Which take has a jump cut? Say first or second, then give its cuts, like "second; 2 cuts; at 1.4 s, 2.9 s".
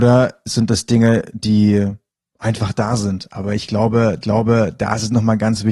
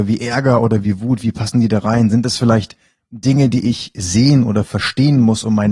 first; 2 cuts; at 2.2 s, 4.2 s